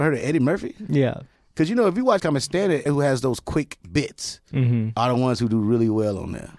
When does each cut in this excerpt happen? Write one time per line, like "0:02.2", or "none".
0:02.2
0:02.9